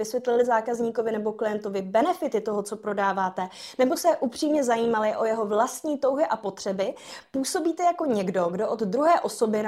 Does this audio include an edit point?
no; 0 cuts

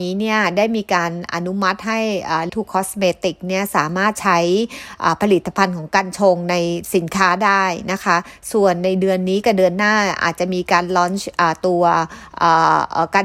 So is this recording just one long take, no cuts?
no; 1 cut; at 2.5 s

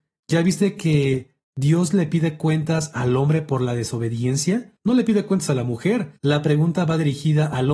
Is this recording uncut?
no; 3 cuts; at 1.4 s, 4.8 s, 6.2 s

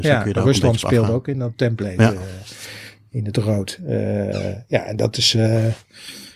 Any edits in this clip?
no; 0 cuts

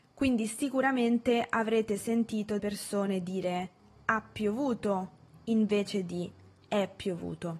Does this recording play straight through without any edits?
no; 1 cut; at 2.6 s

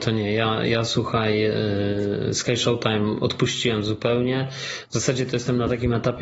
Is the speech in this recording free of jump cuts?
yes; 0 cuts

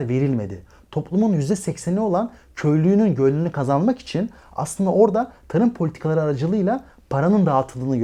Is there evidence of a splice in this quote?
no; 0 cuts

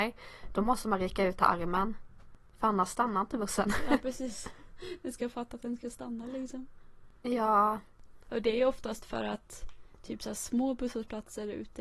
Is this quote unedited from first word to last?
yes; 0 cuts

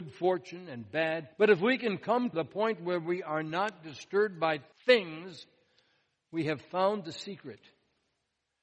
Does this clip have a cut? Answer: yes; 3 cuts; at 1.3 s, 2.3 s, 4.7 s

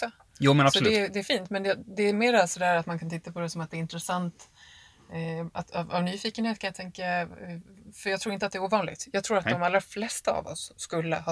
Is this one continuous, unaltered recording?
yes; 0 cuts

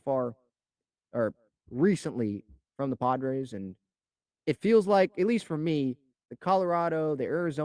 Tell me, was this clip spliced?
no; 0 cuts

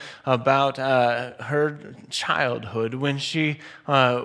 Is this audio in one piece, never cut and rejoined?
yes; 0 cuts

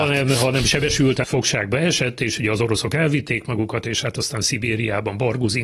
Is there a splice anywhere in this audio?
yes; 1 cut; at 1.2 s

